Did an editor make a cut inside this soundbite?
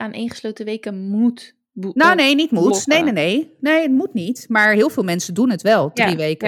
no; 0 cuts

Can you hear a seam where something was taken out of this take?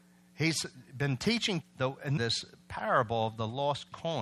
yes; 2 cuts; at 1.6 s, 2.2 s

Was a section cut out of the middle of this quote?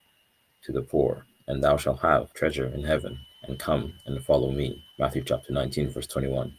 yes; 3 cuts; at 2.3 s, 3.3 s, 4.9 s

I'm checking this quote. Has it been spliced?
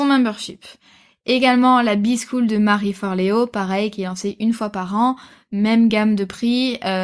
no; 0 cuts

